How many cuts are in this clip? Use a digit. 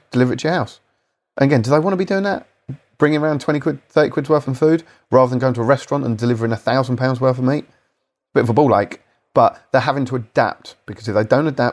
1